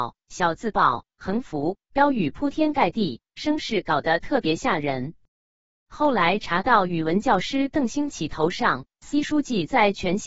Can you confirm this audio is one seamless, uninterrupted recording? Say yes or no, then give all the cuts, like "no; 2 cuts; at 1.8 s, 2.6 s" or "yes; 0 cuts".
yes; 0 cuts